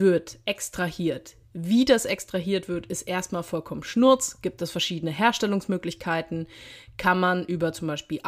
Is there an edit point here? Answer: no; 0 cuts

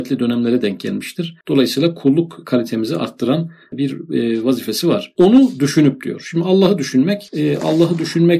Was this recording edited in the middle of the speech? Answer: yes; 1 cut; at 1.4 s

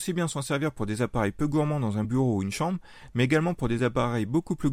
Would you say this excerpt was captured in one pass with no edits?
yes; 0 cuts

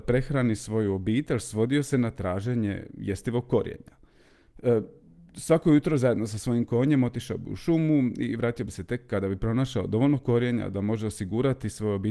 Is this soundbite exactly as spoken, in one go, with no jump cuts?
yes; 0 cuts

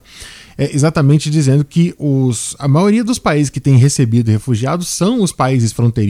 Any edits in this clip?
yes; 1 cut; at 2.0 s

